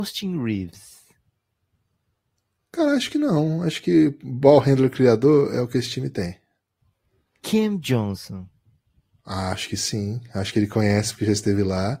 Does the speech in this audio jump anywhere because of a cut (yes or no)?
no